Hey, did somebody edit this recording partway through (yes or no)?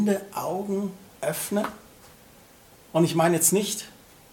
no